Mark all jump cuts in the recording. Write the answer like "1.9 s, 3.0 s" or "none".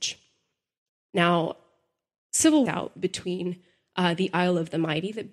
2.7 s

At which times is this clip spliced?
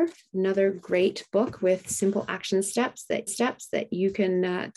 3.3 s

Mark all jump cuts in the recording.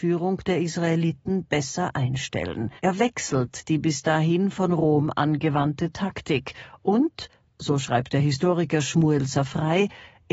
2.8 s

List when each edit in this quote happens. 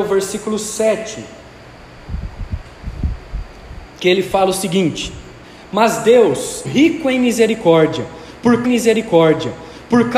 5.4 s, 6.6 s, 8.6 s

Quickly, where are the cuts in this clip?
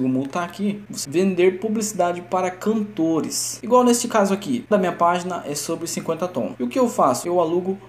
1.0 s, 4.7 s

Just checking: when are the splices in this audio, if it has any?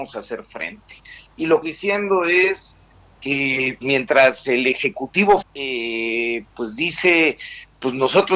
1.6 s, 3.8 s, 5.4 s

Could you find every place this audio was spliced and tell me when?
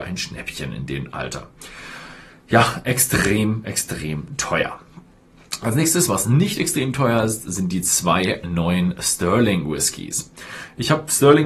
none

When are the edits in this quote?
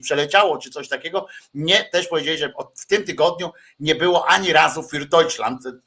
none

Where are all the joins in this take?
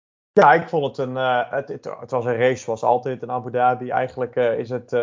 none

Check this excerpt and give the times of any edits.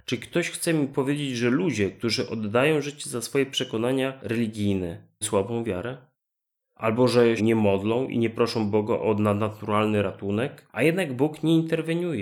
5.2 s, 7.4 s

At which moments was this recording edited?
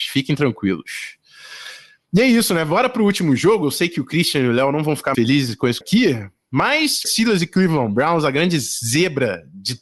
5.1 s, 5.8 s, 7.0 s

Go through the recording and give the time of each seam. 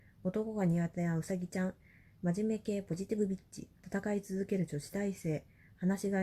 3.8 s

